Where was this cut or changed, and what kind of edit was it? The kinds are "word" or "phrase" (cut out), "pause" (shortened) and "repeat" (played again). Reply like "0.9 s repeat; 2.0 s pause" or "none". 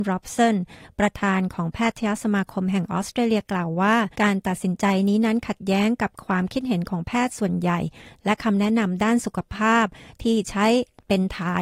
4.1 s pause